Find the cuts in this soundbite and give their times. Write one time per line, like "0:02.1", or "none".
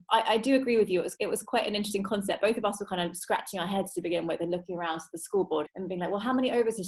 0:01.2
0:05.6